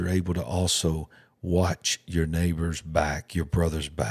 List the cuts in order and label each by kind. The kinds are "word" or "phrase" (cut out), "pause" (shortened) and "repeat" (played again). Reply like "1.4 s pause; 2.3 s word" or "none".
none